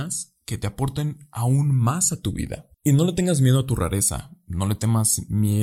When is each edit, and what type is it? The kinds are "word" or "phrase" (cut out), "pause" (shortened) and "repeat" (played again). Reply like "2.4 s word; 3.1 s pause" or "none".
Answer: 2.7 s pause